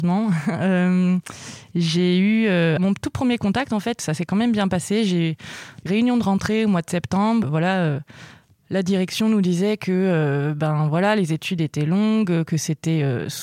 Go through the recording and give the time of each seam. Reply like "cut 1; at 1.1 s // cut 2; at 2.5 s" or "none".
cut 1; at 2.8 s // cut 2; at 4.0 s // cut 3; at 5.9 s // cut 4; at 7.4 s